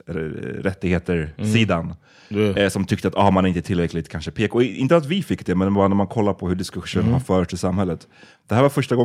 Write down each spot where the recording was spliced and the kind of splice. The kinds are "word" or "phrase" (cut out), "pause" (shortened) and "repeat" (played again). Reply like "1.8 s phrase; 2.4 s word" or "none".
none

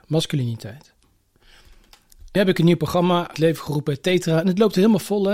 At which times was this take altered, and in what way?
2.4 s word; 3.3 s phrase

